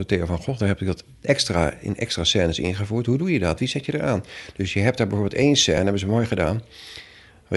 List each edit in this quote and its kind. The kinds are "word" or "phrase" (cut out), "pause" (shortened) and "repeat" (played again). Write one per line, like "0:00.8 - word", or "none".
none